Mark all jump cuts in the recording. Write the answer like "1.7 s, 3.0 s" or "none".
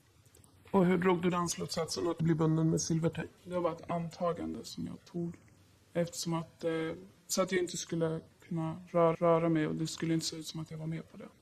2.2 s, 3.4 s, 5.1 s, 9.1 s